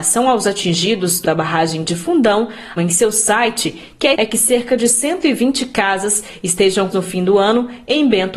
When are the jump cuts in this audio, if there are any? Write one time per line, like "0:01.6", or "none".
0:01.2
0:02.8
0:04.1
0:06.9